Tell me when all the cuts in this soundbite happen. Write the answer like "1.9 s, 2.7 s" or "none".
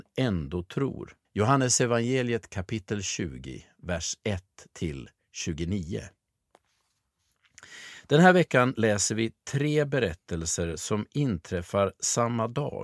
1.2 s